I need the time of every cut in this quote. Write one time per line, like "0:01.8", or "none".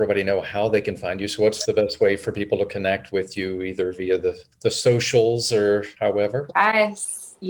0:04.5
0:06.0